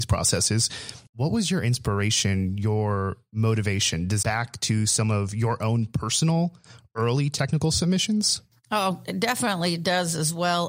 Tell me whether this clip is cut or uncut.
cut